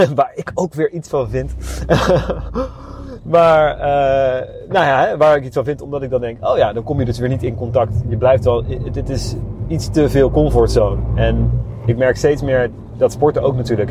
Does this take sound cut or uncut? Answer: uncut